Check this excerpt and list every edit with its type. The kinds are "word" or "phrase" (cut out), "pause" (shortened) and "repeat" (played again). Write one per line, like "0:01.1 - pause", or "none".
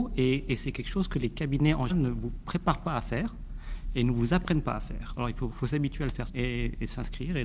0:01.9 - word
0:05.5 - word
0:06.3 - word

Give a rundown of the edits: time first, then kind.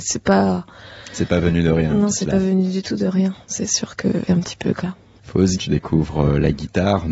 0:04.3 - word
0:04.8 - word
0:05.6 - word

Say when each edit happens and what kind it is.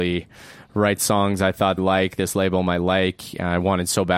0:01.8 - phrase

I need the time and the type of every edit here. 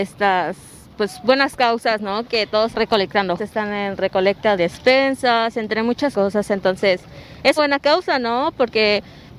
0:02.7 - word
0:03.4 - word
0:04.6 - word
0:06.1 - word
0:07.6 - word

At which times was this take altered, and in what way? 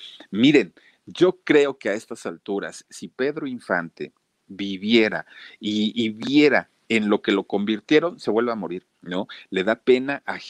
0:08.9 - pause

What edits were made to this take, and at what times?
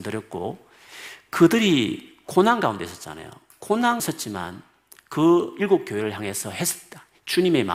0:04.0 - word

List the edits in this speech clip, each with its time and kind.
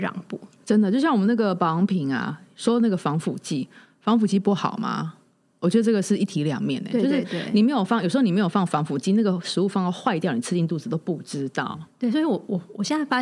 none

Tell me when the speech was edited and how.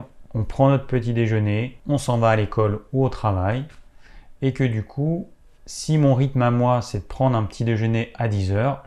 none

